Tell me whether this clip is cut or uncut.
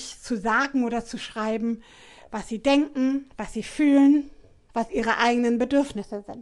uncut